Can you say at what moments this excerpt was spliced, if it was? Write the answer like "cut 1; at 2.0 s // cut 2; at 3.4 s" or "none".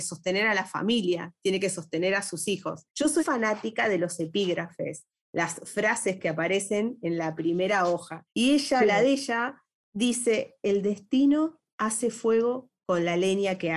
cut 1; at 2.9 s // cut 2; at 3.2 s // cut 3; at 8.3 s